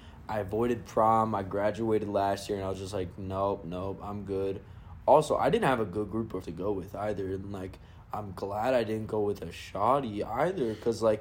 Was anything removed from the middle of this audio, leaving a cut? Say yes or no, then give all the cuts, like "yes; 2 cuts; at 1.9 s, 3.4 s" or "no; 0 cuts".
yes; 1 cut; at 6.4 s